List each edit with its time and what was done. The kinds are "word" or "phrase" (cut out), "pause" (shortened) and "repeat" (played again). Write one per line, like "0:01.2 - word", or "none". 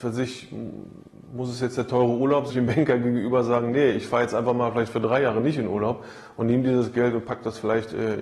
0:02.5 - phrase